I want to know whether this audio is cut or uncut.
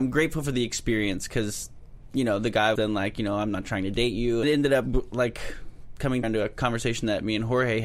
cut